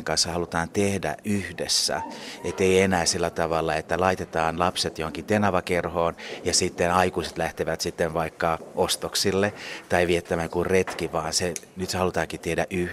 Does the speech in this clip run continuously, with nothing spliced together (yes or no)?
yes